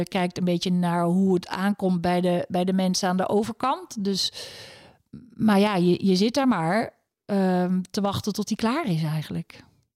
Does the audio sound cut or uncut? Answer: uncut